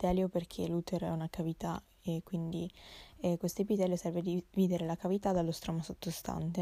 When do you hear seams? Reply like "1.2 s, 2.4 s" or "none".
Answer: none